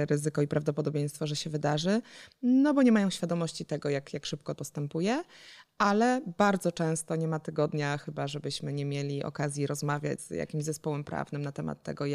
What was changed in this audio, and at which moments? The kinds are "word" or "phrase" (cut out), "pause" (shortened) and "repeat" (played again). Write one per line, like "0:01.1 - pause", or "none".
0:04.6 - phrase
0:10.2 - word